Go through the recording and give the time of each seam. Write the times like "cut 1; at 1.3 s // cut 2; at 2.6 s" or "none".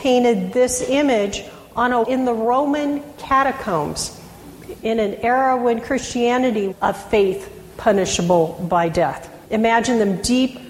cut 1; at 2.0 s // cut 2; at 6.7 s // cut 3; at 9.4 s